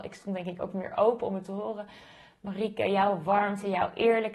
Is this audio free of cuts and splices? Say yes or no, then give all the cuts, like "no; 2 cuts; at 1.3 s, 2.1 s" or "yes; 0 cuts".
yes; 0 cuts